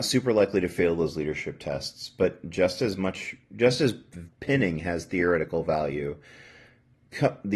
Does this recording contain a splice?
no; 0 cuts

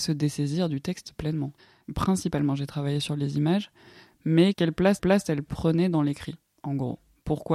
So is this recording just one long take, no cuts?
no; 1 cut; at 5.0 s

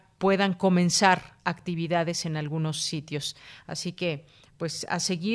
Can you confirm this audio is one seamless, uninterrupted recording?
no; 1 cut; at 1.4 s

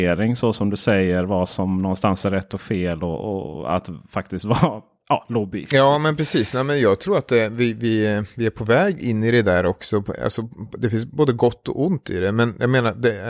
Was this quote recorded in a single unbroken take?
yes; 0 cuts

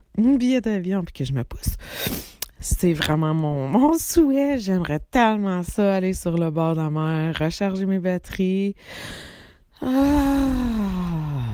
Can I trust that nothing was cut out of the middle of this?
yes; 0 cuts

